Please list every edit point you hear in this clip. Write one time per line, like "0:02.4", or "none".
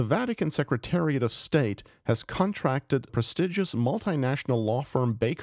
0:03.1